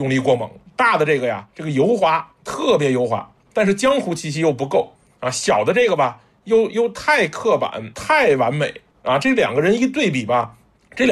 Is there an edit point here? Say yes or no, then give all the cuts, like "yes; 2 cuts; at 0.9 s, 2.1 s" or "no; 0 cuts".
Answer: no; 0 cuts